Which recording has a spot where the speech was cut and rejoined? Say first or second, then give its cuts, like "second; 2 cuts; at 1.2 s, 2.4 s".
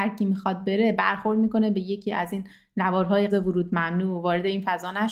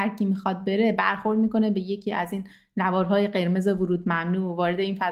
first; 1 cut; at 3.3 s